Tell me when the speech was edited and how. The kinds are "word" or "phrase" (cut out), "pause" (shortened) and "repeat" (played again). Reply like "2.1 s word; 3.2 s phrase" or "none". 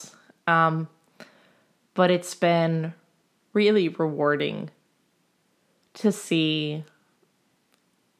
none